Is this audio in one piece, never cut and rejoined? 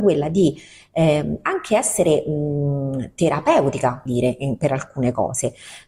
no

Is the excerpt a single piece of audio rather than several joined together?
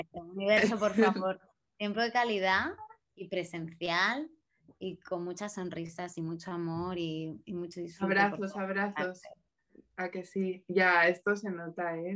yes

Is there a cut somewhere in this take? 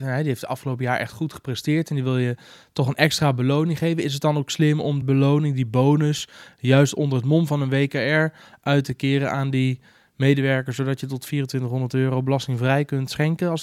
yes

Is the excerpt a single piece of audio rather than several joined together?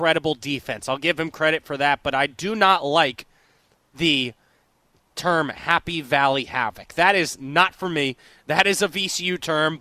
yes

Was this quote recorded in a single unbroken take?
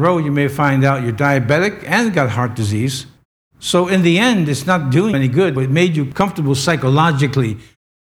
no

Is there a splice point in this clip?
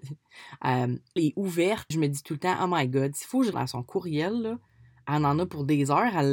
yes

